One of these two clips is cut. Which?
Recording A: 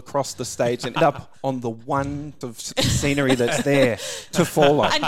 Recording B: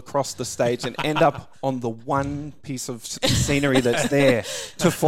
A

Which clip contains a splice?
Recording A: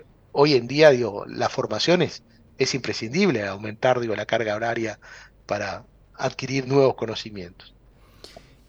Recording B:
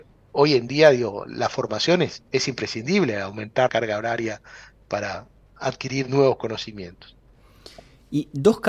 B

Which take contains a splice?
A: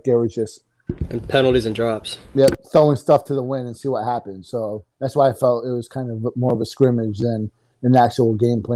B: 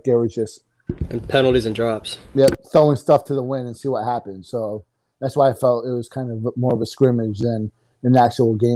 A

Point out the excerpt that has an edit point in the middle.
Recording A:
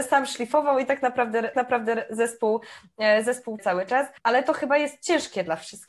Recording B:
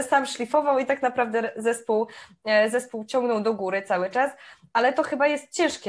A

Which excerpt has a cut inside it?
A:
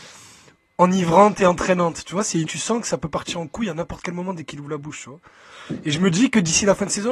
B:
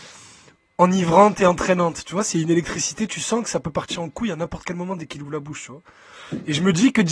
A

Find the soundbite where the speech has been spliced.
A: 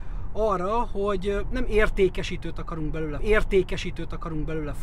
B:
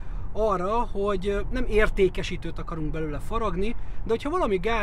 A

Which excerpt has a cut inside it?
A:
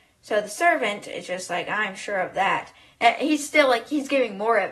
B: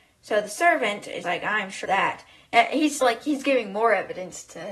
B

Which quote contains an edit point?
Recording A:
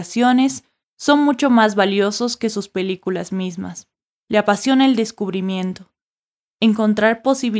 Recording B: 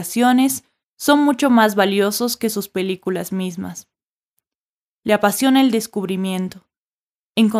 A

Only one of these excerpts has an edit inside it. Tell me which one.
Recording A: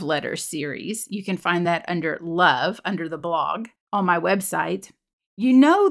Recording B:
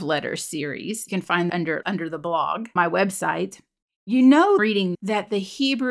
B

